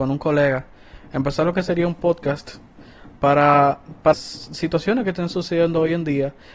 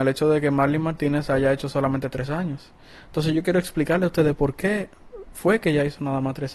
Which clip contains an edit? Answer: first; 1 cut; at 4.1 s

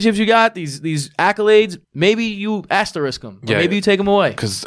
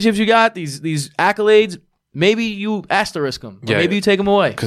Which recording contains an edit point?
first; 1 cut; at 1.8 s

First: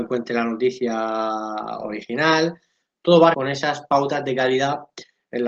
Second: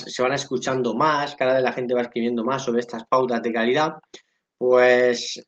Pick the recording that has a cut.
first; 1 cut; at 3.3 s

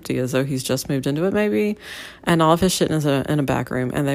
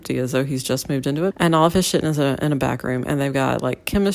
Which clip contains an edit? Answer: second; 1 cut; at 1.3 s

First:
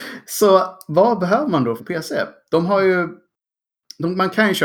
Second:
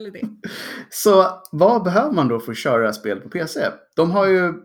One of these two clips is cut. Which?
first; 1 cut; at 1.8 s

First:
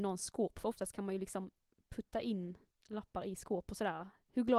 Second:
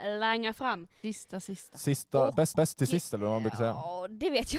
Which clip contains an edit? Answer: second; 1 cut; at 2.5 s

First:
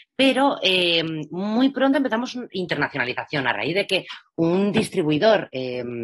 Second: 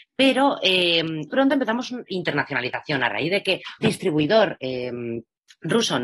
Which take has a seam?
second; 2 cuts; at 1.3 s, 3.8 s

